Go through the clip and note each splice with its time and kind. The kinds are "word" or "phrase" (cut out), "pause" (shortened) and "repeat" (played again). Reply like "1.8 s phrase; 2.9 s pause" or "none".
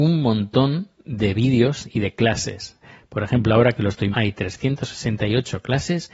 4.1 s word